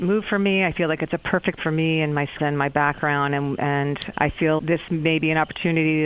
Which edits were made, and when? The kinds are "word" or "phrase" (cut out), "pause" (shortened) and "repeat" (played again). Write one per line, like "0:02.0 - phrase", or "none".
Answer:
0:01.6 - word
0:02.4 - word
0:04.1 - word
0:04.6 - word